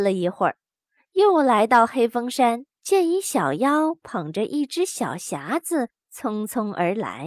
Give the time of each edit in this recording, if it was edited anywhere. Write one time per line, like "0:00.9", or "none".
0:02.7